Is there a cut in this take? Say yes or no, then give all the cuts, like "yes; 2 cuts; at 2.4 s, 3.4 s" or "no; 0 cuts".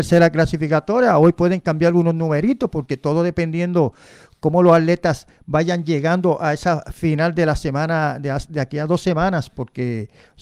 no; 0 cuts